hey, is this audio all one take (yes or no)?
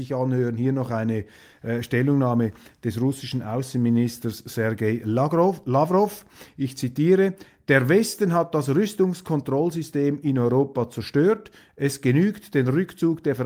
yes